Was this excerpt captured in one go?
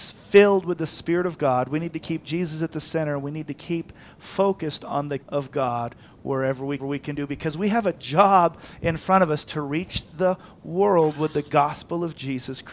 no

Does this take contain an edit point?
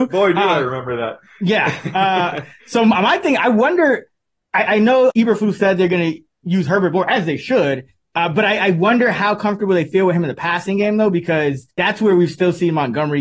yes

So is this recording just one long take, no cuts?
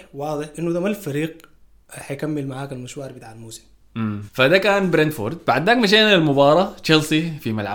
yes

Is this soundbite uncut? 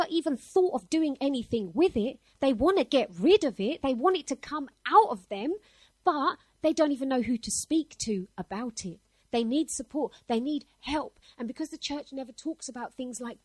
yes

